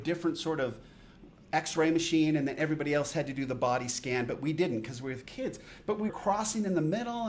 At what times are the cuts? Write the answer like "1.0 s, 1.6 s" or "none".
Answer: 6.1 s